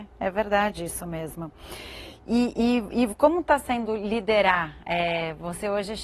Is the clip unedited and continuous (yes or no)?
yes